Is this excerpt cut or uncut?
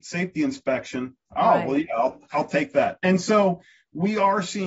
uncut